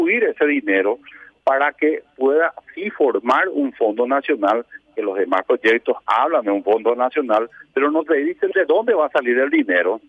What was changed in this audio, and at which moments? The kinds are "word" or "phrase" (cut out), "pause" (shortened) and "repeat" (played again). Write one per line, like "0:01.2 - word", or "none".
none